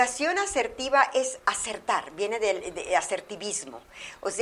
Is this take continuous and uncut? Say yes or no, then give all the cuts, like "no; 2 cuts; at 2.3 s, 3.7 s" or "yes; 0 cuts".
yes; 0 cuts